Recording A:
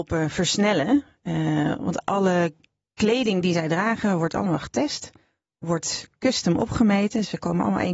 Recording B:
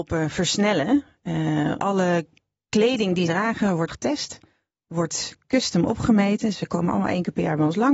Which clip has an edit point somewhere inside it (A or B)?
B